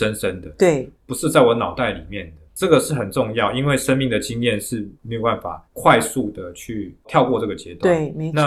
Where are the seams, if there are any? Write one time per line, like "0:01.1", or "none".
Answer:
0:00.9
0:02.5
0:04.9
0:05.7
0:07.0